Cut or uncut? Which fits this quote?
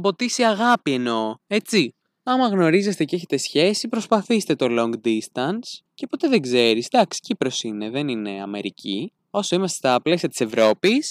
cut